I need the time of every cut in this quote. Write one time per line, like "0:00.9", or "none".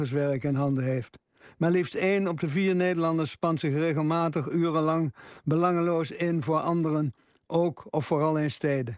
none